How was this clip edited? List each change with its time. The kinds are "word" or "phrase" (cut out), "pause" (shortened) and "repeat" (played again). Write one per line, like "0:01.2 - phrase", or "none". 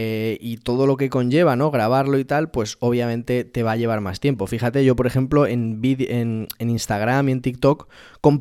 none